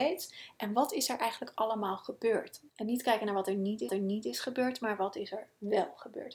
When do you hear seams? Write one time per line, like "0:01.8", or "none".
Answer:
0:02.7
0:03.9